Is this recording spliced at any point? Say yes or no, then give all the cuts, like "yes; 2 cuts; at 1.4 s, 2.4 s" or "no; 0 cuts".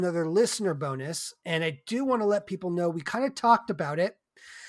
no; 0 cuts